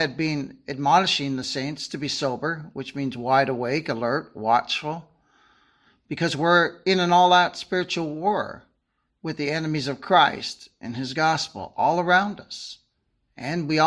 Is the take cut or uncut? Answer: uncut